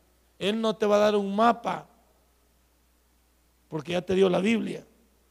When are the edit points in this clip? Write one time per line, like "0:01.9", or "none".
none